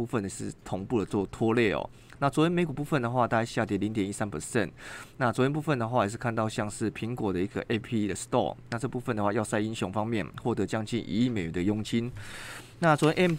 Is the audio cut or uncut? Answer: cut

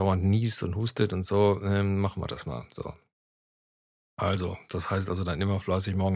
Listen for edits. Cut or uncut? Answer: uncut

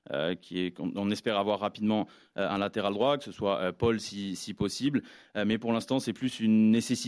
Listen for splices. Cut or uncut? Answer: uncut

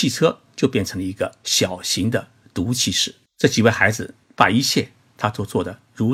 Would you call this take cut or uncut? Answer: cut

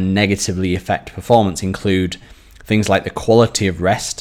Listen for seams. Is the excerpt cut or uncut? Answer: uncut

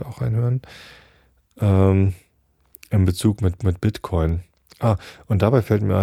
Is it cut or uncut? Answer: cut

